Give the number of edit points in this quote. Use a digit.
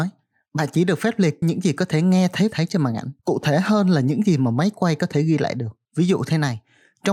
4